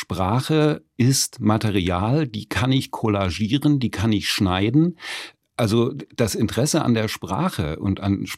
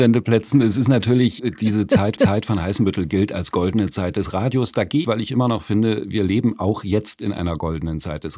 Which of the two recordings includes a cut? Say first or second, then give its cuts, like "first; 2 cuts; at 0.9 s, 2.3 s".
second; 3 cuts; at 1.4 s, 2.2 s, 5.0 s